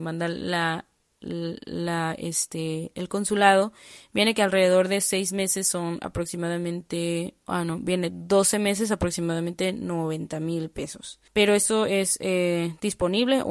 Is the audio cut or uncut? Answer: cut